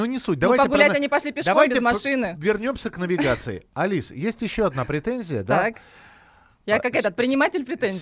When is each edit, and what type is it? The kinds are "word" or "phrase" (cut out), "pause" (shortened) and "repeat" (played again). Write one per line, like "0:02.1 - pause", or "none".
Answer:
none